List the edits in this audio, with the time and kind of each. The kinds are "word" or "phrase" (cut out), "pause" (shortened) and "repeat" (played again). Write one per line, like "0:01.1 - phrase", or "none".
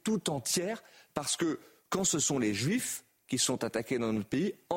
none